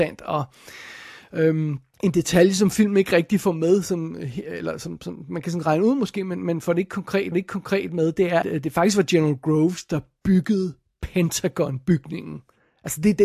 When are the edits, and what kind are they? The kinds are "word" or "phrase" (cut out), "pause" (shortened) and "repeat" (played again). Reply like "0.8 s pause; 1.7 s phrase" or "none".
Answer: 1.9 s pause; 7.3 s repeat; 8.4 s word

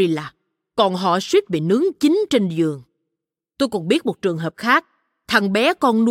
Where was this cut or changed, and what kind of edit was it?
none

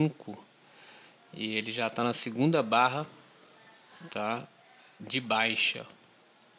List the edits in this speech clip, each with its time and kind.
none

